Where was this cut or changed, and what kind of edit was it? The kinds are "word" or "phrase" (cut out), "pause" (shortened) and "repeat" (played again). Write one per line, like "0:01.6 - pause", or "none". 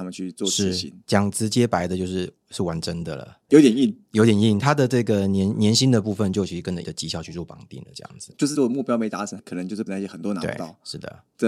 0:03.5 - word
0:06.8 - word
0:08.5 - word
0:09.9 - word